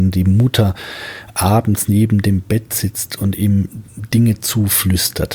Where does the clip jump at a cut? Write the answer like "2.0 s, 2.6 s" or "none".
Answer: none